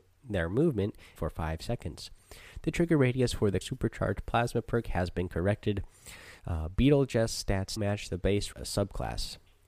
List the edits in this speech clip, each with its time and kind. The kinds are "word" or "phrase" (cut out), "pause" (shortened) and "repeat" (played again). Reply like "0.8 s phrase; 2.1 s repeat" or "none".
1.2 s phrase; 3.6 s word; 6.4 s pause; 7.8 s word; 8.5 s word